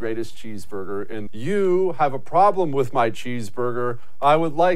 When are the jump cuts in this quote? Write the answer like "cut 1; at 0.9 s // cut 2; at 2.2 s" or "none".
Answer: cut 1; at 1.3 s